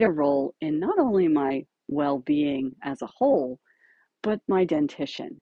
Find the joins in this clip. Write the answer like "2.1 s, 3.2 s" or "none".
none